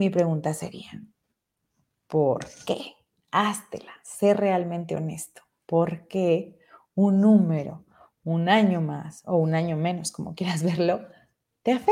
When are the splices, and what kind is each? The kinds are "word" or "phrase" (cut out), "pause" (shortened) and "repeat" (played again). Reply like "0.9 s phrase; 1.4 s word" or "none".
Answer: none

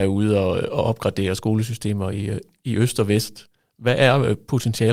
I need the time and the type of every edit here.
none

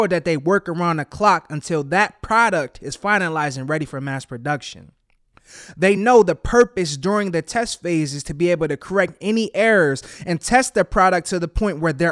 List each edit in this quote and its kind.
none

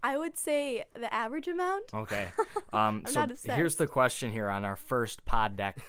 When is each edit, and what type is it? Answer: none

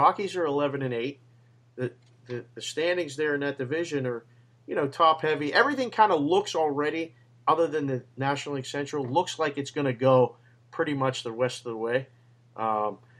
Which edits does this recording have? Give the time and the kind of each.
none

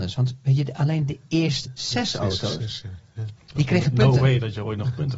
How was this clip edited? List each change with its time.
1.6 s word

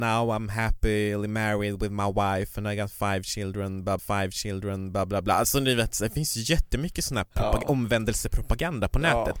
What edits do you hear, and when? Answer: 4.0 s repeat

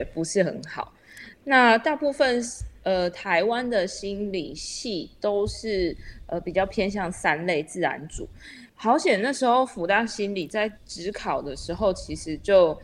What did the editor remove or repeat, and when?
8.7 s pause; 10.8 s pause

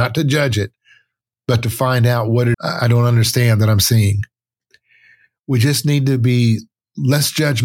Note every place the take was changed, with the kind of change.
2.5 s phrase

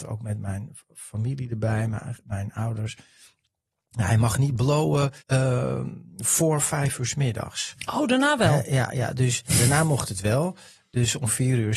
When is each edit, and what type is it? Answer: 5.2 s pause

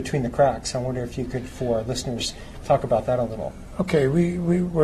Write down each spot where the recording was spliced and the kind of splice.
none

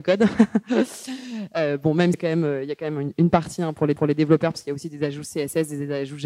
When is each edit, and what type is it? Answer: 2.1 s phrase; 4.0 s repeat

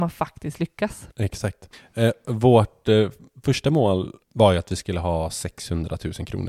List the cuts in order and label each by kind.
1.1 s pause; 4.2 s pause

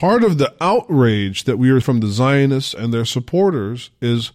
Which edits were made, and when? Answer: 1.8 s word

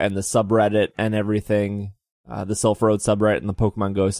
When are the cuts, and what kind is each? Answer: none

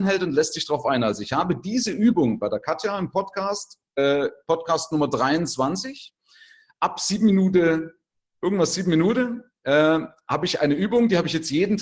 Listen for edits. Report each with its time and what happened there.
none

